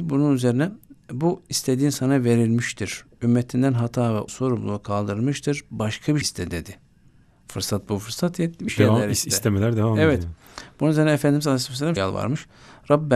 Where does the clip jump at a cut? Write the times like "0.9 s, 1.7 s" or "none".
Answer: 4.3 s, 6.2 s, 8.7 s, 12.0 s